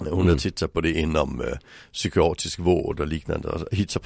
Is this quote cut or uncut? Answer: uncut